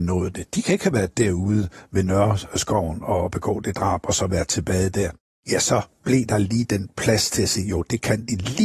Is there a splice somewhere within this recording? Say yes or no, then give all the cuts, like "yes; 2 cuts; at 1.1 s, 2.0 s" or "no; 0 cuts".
no; 0 cuts